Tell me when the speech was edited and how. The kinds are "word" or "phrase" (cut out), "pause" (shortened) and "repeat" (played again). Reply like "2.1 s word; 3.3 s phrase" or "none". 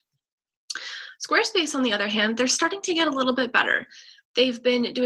none